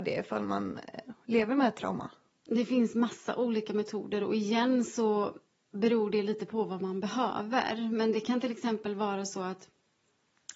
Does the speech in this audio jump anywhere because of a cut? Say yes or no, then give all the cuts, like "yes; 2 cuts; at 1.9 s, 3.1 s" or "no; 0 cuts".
no; 0 cuts